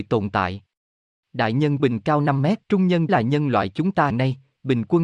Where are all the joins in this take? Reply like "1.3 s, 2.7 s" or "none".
1.8 s, 2.6 s, 3.1 s, 4.1 s